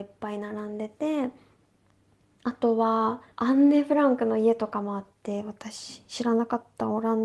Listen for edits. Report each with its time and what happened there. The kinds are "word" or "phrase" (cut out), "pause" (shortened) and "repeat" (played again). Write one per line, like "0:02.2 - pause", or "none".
0:03.3 - pause